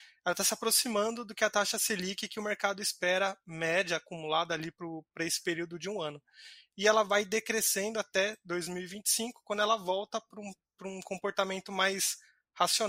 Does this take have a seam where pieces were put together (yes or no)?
no